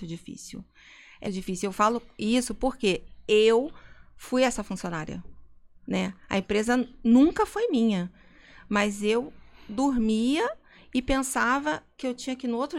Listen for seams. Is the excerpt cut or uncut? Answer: cut